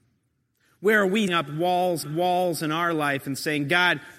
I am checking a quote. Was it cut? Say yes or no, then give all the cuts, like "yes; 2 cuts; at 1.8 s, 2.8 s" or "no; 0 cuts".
yes; 2 cuts; at 1.3 s, 2.0 s